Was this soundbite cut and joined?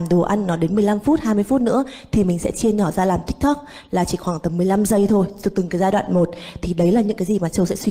no; 0 cuts

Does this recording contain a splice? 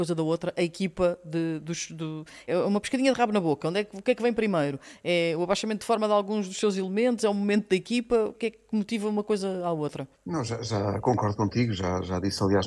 yes; 3 cuts; at 2.5 s, 8.3 s, 10.1 s

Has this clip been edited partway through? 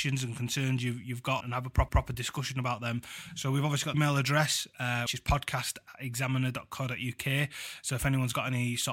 yes; 4 cuts; at 1.4 s, 1.9 s, 3.9 s, 5.1 s

